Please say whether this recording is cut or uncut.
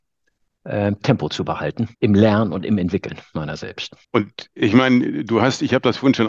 cut